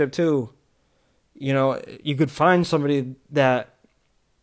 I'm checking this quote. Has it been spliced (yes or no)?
no